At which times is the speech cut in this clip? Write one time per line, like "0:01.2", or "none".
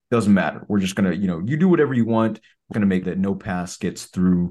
0:02.7
0:03.0